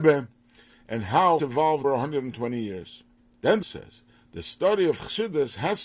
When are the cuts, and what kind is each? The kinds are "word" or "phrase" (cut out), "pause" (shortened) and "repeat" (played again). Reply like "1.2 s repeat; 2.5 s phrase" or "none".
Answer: 1.4 s word; 1.8 s word; 3.6 s word